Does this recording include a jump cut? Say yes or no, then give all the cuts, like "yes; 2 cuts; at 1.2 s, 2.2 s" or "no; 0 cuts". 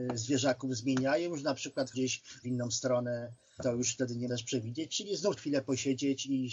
yes; 5 cuts; at 1.9 s, 2.4 s, 3.6 s, 4.3 s, 5.4 s